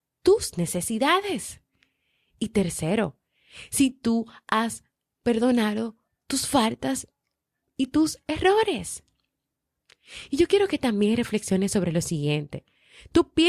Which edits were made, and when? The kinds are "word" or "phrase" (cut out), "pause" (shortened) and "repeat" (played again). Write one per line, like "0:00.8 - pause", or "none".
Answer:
none

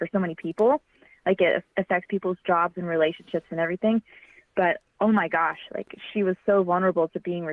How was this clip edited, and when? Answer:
none

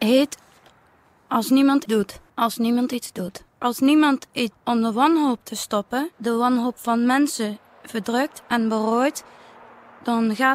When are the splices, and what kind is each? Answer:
0:01.9 - word
0:02.3 - pause
0:03.5 - pause
0:04.5 - word
0:06.1 - pause

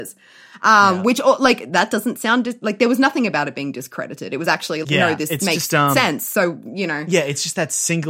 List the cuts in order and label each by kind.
0:04.8 - word

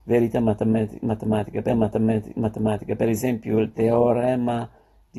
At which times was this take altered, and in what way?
0:01.7 - repeat

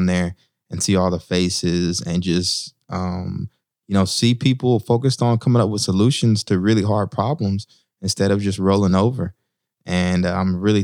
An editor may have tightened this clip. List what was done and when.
none

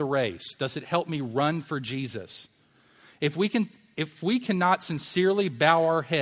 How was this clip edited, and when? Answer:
none

